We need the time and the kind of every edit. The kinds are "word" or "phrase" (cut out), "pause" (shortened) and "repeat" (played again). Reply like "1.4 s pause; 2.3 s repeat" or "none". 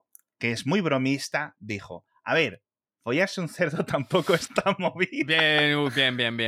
4.5 s word